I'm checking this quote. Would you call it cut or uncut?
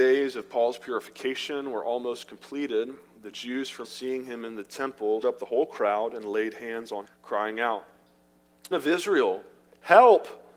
cut